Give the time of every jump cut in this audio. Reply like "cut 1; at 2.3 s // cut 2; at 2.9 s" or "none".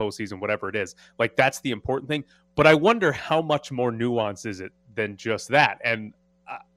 none